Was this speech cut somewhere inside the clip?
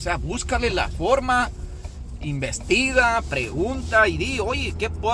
no; 0 cuts

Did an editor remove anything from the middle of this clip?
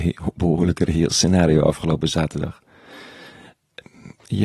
no; 0 cuts

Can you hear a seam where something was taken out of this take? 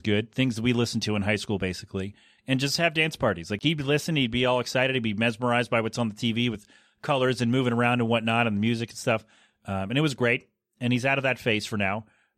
no; 0 cuts

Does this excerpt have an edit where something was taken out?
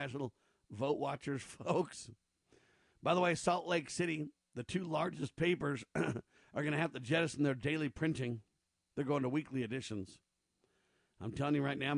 no; 0 cuts

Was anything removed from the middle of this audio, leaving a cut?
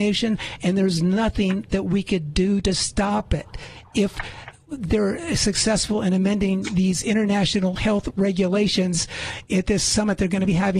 no; 0 cuts

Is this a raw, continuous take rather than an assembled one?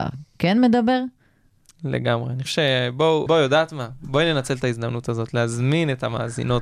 no; 2 cuts; at 2.5 s, 3.3 s

